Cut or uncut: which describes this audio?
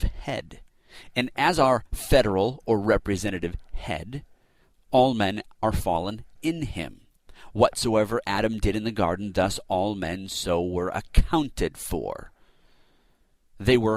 uncut